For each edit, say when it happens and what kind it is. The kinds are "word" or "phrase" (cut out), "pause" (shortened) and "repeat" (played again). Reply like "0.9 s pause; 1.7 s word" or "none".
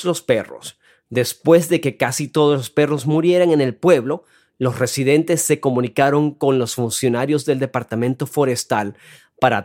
none